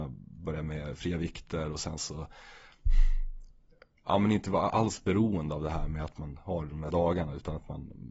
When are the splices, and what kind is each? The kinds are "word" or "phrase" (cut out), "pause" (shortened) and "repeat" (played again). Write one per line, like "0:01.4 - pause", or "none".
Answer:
0:06.9 - word